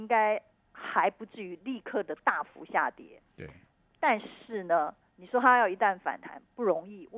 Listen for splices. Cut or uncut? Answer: uncut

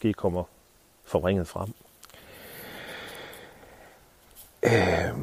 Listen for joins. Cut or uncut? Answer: uncut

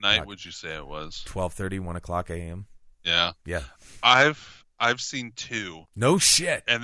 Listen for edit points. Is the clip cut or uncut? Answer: cut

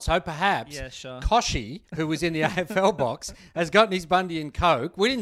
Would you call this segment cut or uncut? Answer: cut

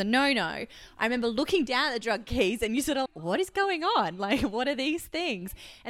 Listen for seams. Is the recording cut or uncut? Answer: cut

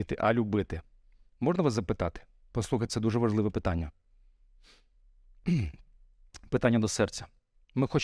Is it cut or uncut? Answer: cut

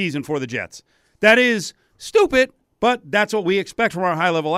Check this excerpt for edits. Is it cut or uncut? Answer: cut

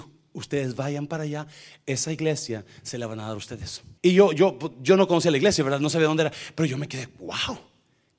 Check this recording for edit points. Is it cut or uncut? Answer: cut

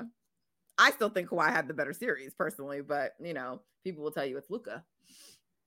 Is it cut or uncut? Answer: uncut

